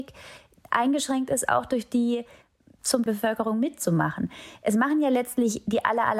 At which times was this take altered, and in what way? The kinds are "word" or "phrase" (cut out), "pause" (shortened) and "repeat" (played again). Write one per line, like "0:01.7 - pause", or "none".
0:03.1 - phrase